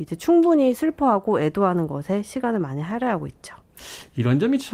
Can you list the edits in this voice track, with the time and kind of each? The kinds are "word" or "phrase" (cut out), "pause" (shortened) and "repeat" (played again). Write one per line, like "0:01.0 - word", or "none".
none